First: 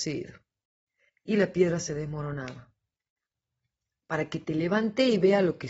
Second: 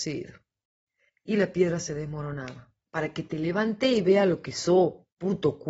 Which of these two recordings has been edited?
second; 1 cut; at 2.8 s

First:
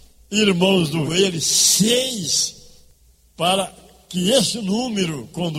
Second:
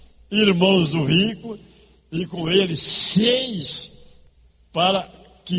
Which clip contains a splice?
first; 1 cut; at 1.1 s

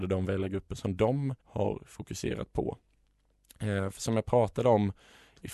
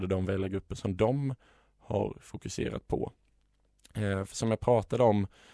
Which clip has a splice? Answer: first; 1 cut; at 1.4 s

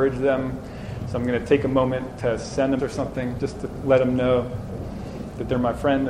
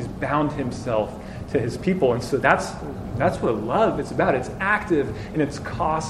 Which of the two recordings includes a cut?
first; 1 cut; at 2.8 s

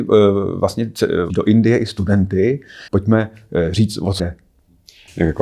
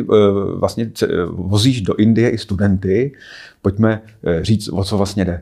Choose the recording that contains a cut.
first; 3 cuts; at 1.3 s, 2.9 s, 4.2 s

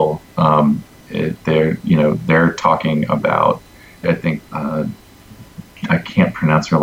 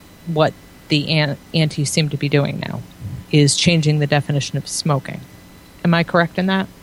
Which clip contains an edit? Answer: first; 2 cuts; at 4.0 s, 4.4 s

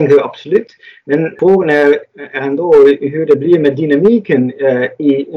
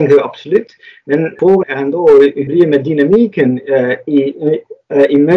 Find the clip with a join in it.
second; 2 cuts; at 1.6 s, 2.5 s

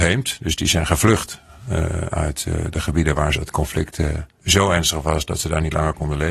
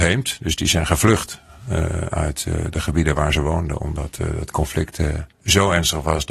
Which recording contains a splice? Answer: first; 1 cut; at 3.4 s

